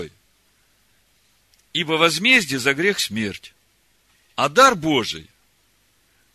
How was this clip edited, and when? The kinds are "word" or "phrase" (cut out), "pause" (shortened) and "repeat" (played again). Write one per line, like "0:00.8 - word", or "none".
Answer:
0:04.1 - pause